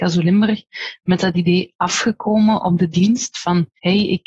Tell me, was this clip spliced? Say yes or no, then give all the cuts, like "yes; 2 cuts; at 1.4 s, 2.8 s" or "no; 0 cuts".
no; 0 cuts